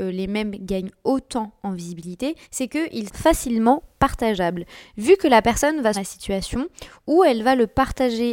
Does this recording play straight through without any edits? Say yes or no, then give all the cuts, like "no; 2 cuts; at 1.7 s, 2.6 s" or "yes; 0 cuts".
no; 3 cuts; at 2.4 s, 3.1 s, 5.9 s